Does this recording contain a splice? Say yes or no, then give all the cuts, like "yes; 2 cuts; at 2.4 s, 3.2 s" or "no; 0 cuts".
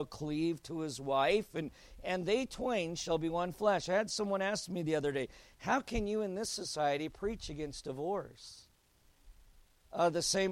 no; 0 cuts